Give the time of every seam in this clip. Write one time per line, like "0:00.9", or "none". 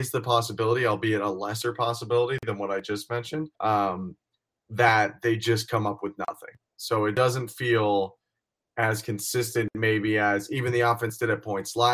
0:03.5